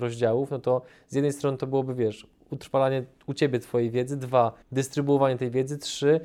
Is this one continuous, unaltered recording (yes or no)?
no